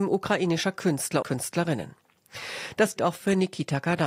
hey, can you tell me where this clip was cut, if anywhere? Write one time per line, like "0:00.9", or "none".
0:01.2
0:03.0